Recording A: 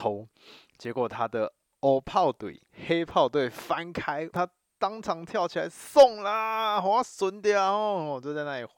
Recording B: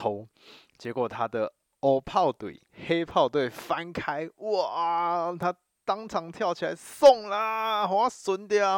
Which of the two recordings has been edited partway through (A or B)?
A